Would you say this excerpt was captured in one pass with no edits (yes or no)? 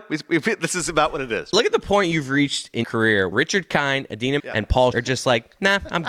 no